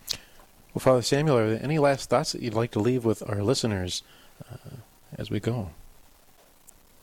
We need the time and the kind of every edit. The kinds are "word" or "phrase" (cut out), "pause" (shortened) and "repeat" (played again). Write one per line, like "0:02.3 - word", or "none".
none